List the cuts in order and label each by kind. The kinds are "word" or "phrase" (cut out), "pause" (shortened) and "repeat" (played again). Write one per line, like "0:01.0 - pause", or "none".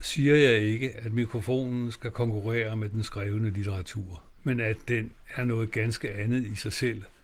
0:04.4 - pause